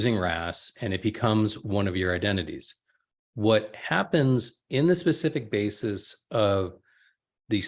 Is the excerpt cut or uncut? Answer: uncut